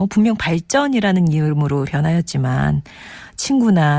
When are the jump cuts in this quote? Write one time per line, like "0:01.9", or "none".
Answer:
0:01.9